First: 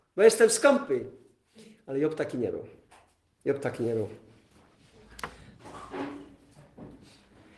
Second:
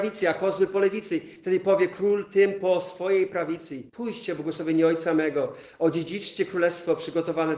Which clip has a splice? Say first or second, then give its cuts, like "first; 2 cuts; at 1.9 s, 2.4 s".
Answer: second; 1 cut; at 3.9 s